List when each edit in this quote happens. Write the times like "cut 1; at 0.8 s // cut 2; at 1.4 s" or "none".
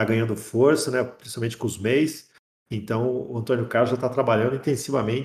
none